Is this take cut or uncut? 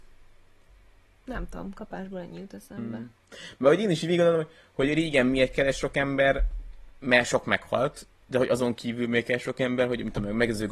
uncut